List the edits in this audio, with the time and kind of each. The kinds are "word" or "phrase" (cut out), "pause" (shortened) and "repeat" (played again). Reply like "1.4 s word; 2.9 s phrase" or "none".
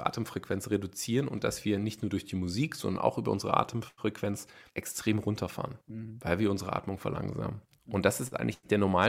4.7 s pause; 5.8 s pause; 7.6 s pause